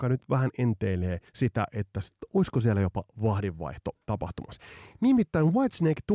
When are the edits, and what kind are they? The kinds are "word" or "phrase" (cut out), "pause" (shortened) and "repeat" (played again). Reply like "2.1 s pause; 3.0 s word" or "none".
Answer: 1.3 s pause